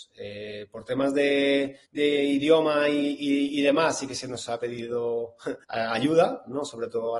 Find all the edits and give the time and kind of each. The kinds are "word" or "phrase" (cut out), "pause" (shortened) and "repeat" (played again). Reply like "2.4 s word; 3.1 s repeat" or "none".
1.8 s pause; 5.6 s pause